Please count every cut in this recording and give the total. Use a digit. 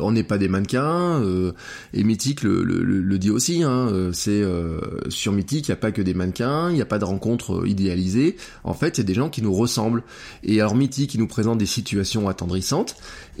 0